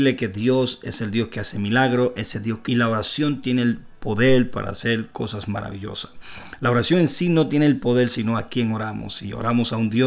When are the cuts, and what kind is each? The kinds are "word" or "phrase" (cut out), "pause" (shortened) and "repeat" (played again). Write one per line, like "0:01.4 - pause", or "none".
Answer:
0:02.7 - phrase